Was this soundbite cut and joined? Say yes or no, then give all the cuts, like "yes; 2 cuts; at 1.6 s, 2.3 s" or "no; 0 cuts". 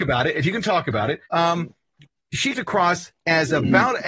yes; 2 cuts; at 1.3 s, 2.5 s